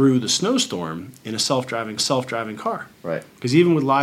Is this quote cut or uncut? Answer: cut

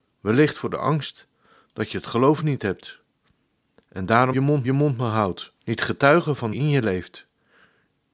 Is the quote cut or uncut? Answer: cut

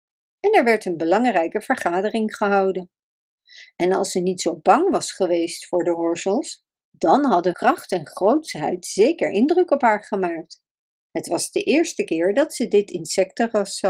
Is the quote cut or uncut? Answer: cut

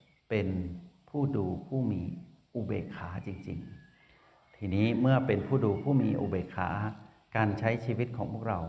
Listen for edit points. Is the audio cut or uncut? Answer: uncut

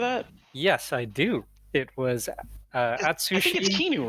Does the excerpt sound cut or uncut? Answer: uncut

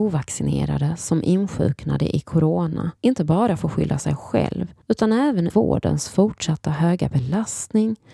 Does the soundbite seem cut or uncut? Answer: cut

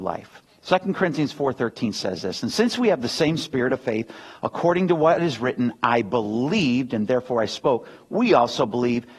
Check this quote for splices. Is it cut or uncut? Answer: uncut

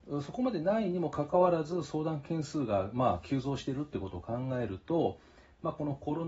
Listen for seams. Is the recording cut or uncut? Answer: uncut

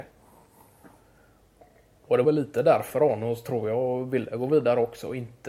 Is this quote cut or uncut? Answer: cut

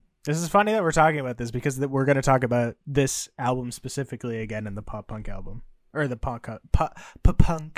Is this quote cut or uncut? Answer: uncut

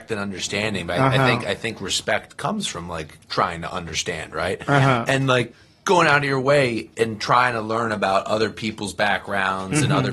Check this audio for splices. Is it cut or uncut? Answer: uncut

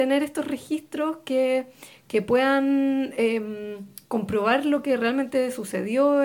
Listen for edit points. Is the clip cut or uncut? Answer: uncut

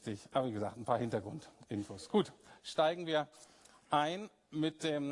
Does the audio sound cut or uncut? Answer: uncut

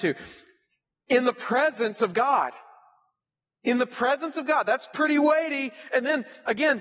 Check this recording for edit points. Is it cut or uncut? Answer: uncut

